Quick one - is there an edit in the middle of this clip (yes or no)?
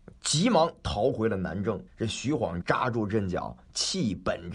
yes